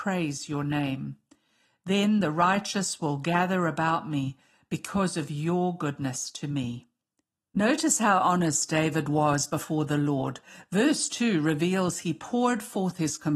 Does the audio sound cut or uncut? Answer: uncut